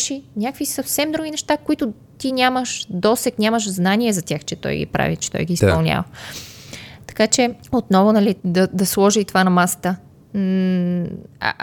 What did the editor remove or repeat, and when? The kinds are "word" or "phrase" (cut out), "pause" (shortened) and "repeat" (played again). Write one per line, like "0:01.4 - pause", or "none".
0:07.6 - pause
0:08.4 - pause